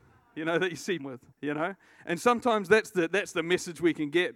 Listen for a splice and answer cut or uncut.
cut